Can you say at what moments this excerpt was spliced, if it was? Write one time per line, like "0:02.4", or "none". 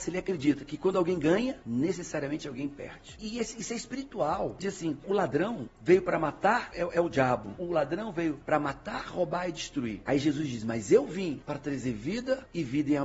0:04.6
0:06.7